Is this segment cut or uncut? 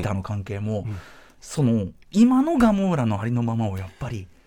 uncut